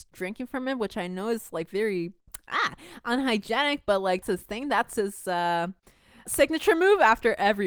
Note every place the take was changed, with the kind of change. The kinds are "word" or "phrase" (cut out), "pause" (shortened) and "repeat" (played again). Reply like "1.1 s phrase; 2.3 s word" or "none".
4.2 s word; 6.3 s word